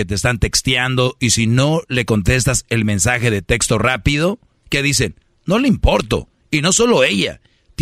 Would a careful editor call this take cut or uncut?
uncut